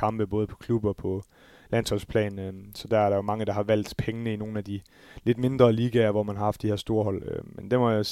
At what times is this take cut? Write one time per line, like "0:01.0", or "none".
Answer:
none